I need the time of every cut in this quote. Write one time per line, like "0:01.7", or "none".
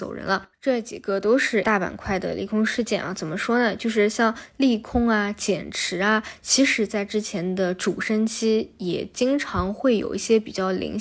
0:01.6